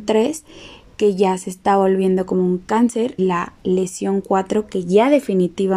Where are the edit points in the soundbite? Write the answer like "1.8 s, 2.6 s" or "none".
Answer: 3.2 s